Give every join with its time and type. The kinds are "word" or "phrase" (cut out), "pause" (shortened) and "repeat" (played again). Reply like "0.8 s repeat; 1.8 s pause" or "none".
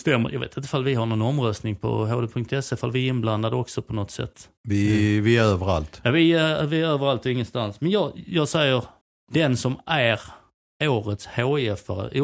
4.6 s pause; 9.0 s pause